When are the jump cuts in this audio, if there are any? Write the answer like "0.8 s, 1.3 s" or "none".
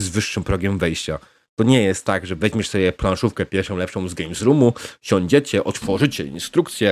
none